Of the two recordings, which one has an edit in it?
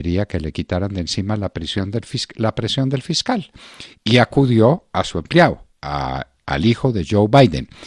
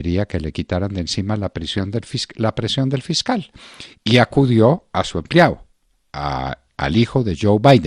first; 1 cut; at 5.7 s

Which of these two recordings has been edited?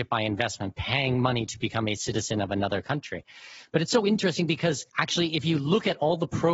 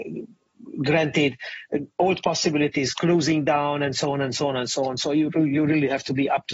first; 1 cut; at 4.9 s

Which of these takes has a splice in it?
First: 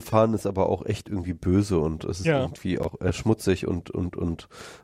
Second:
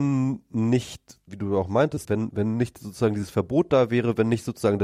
second; 2 cuts; at 1.3 s, 2.0 s

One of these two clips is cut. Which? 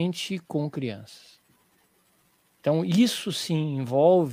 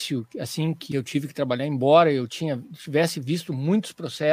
second; 1 cut; at 0.9 s

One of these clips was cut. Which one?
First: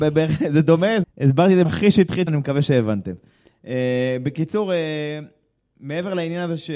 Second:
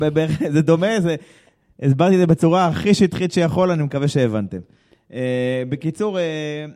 first; 3 cuts; at 1.0 s, 1.6 s, 2.3 s

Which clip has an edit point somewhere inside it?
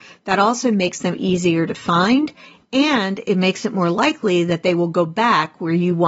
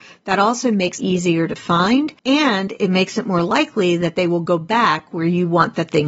second; 2 cuts; at 1.0 s, 2.2 s

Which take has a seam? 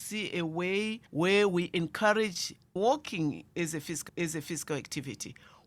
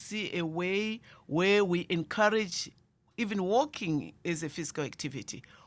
first; 3 cuts; at 1.1 s, 2.8 s, 4.1 s

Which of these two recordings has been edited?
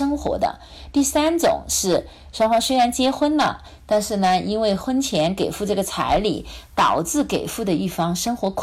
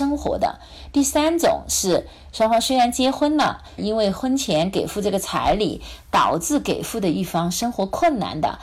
second; 1 cut; at 3.8 s

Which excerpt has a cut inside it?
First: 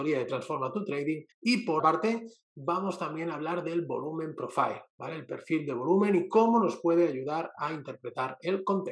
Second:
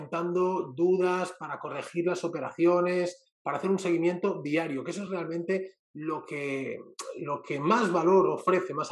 first; 2 cuts; at 1.3 s, 1.8 s

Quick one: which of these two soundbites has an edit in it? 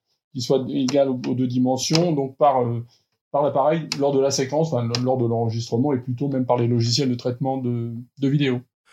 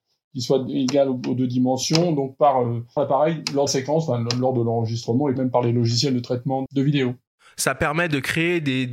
second; 4 cuts; at 3.0 s, 3.7 s, 5.4 s, 6.7 s

